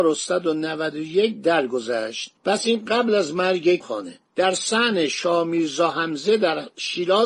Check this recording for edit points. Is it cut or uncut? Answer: cut